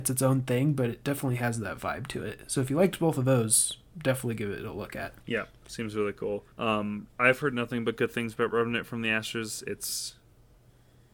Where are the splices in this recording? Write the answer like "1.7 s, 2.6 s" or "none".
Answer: 5.2 s, 6.5 s